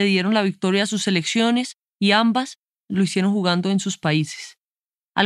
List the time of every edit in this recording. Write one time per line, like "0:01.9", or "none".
none